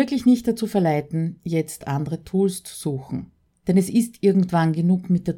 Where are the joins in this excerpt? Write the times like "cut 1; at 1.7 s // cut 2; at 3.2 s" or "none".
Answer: none